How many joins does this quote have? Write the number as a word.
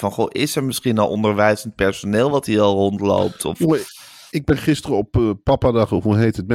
zero